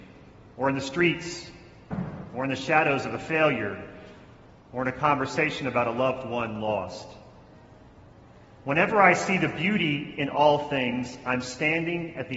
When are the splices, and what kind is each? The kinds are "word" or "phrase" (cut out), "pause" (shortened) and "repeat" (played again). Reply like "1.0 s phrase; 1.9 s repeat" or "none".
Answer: none